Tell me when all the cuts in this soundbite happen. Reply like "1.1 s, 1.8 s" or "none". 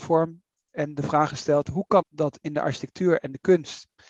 2.0 s